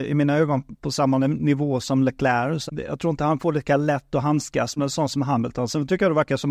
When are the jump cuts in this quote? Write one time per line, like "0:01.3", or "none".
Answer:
0:01.8
0:02.7
0:03.4
0:04.8